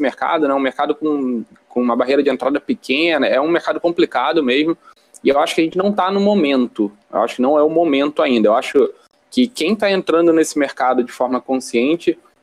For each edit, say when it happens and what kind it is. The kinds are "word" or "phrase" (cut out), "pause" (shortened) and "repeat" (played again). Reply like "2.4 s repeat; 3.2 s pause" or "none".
none